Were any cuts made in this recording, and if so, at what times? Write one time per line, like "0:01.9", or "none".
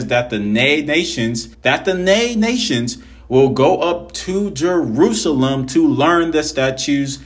0:01.5